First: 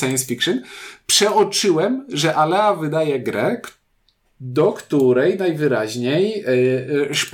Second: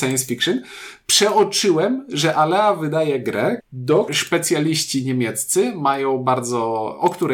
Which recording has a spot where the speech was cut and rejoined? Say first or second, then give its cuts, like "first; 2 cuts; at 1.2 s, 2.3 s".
second; 2 cuts; at 3.6 s, 4.1 s